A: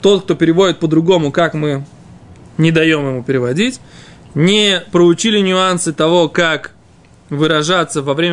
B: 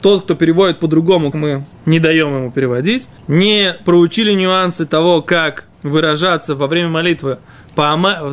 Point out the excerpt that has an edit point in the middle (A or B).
B